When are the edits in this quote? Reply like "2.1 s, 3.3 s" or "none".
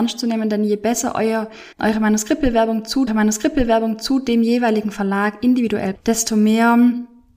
1.7 s, 3.1 s, 5.9 s